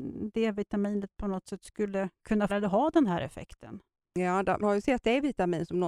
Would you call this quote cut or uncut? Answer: cut